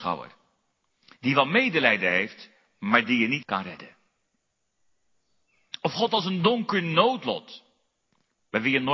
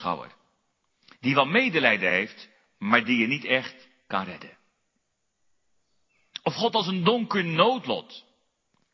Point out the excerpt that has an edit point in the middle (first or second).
first